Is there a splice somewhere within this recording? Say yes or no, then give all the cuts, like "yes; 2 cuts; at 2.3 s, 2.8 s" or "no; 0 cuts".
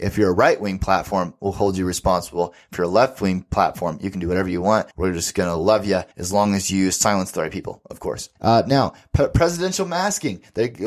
yes; 3 cuts; at 4.9 s, 6.1 s, 8.4 s